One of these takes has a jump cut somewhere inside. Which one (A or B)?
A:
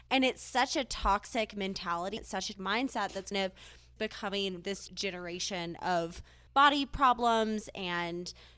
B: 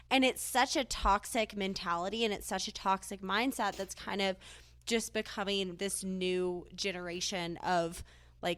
A